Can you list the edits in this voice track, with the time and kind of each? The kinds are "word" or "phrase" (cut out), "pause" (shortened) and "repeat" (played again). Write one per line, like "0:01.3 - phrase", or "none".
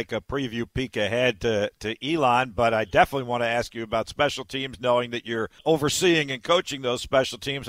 0:05.6 - pause